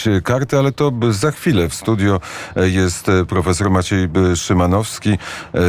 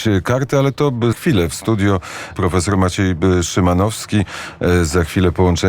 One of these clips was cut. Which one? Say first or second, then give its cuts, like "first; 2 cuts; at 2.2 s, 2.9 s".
second; 2 cuts; at 1.1 s, 2.3 s